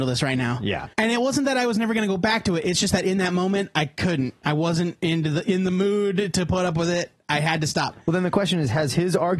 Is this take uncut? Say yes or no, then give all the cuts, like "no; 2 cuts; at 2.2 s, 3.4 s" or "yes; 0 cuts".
no; 1 cut; at 0.9 s